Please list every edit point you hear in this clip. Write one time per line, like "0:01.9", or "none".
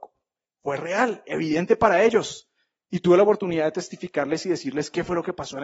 none